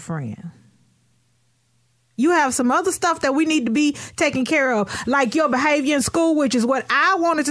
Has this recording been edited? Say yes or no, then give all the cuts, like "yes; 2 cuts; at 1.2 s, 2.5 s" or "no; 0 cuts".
no; 0 cuts